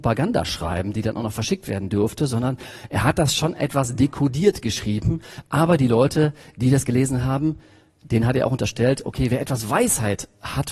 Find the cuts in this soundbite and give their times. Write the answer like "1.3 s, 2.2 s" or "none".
none